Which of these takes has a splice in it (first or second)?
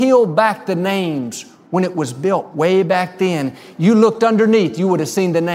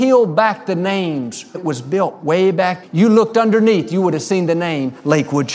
second